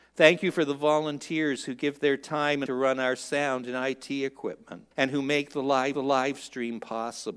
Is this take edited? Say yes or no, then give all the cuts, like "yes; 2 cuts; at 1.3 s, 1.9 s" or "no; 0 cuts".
yes; 3 cuts; at 2.7 s, 4.9 s, 5.9 s